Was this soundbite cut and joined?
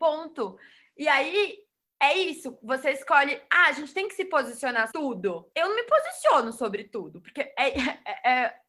yes; 2 cuts; at 4.9 s, 5.5 s

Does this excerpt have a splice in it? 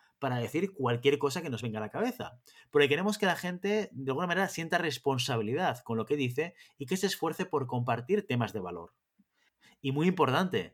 no; 0 cuts

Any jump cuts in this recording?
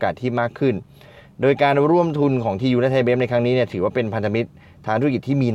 no; 0 cuts

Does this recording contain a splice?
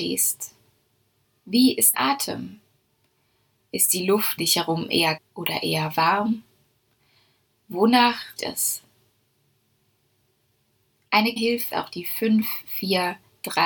yes; 6 cuts; at 1.9 s, 4.4 s, 5.2 s, 8.4 s, 11.4 s, 11.7 s

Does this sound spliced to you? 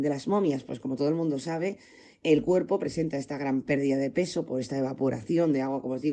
no; 0 cuts

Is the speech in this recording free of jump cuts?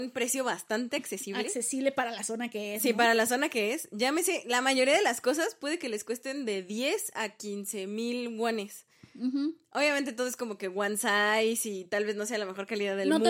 yes; 0 cuts

